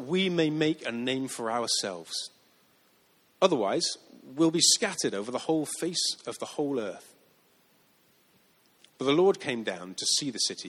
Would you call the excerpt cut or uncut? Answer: uncut